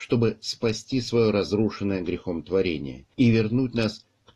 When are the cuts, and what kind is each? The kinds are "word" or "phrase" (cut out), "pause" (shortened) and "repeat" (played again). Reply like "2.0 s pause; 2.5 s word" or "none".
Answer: 3.1 s pause